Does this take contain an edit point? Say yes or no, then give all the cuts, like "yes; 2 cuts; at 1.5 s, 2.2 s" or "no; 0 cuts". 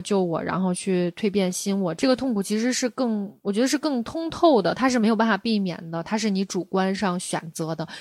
yes; 1 cut; at 3.4 s